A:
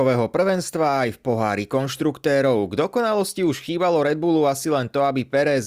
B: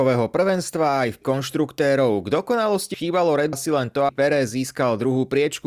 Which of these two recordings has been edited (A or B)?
B